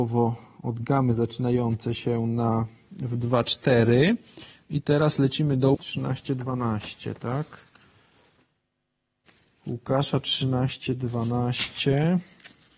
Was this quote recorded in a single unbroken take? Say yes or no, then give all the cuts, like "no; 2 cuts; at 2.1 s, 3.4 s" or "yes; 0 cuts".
no; 1 cut; at 5.7 s